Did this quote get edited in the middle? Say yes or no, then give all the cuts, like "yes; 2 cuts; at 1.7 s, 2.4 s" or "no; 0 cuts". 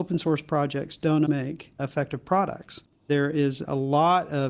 yes; 1 cut; at 1.3 s